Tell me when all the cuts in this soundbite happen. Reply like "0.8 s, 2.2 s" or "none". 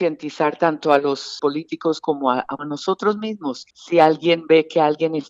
1.4 s, 2.6 s, 3.7 s